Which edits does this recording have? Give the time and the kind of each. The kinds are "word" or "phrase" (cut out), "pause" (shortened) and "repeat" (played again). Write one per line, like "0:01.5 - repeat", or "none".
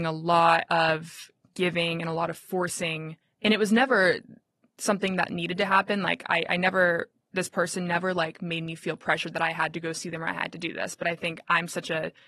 0:03.2 - pause

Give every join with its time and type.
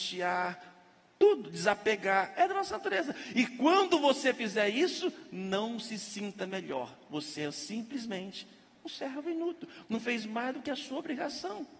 none

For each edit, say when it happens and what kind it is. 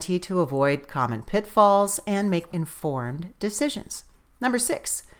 0:02.5 - word

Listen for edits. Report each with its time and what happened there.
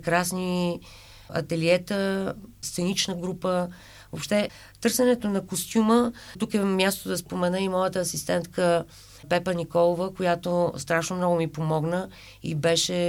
none

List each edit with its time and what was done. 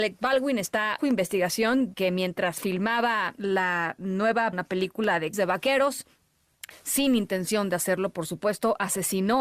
0:01.0 - word
0:01.9 - word
0:03.4 - word
0:04.5 - word
0:05.3 - word
0:06.7 - word

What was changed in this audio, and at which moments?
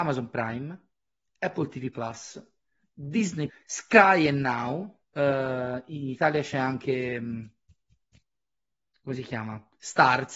0:03.5 - word
0:05.0 - pause

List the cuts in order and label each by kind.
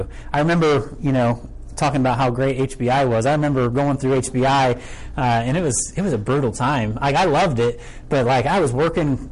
none

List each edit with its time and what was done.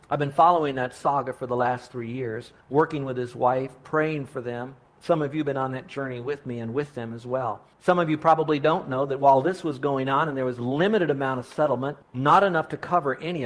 0:02.6 - pause
0:07.7 - pause
0:12.0 - pause

